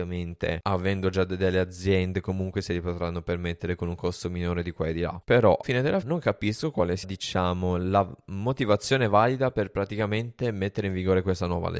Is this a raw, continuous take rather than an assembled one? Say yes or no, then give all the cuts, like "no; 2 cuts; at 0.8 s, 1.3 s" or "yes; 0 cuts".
no; 3 cuts; at 5.6 s, 6.0 s, 7.0 s